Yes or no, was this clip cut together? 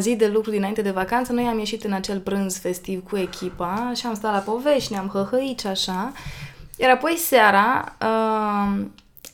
no